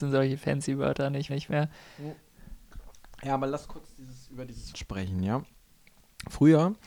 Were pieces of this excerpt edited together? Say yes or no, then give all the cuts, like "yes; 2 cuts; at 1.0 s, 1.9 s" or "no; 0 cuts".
yes; 3 cuts; at 1.3 s, 3.6 s, 4.7 s